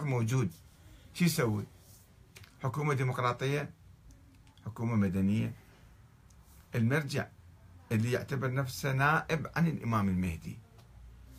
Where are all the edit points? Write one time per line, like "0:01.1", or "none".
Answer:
none